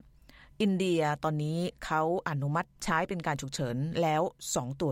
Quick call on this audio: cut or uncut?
cut